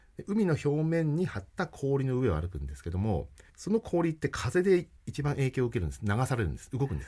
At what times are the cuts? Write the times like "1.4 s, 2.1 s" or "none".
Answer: 3.5 s, 5.0 s